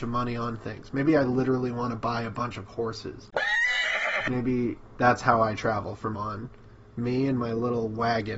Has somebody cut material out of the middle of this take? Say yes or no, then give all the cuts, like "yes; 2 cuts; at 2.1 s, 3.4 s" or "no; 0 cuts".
yes; 1 cut; at 6.1 s